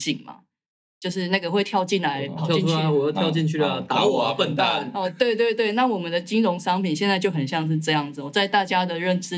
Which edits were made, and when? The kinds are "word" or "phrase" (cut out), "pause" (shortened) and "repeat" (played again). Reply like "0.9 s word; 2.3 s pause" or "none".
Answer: none